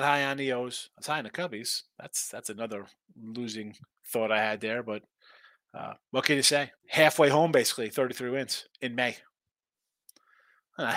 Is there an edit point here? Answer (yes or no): yes